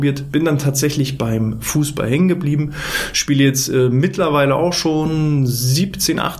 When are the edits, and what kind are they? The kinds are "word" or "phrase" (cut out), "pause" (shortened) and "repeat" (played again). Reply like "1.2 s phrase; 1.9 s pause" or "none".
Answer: none